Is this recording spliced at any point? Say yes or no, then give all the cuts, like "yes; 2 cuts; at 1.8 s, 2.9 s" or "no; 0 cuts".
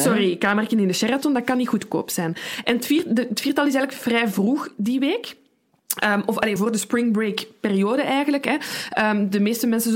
yes; 1 cut; at 6.6 s